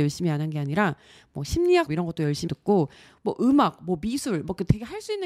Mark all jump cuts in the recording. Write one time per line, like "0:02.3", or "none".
0:01.9
0:02.5